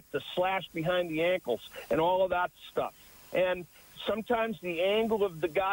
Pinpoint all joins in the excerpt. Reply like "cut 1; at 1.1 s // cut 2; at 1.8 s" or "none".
none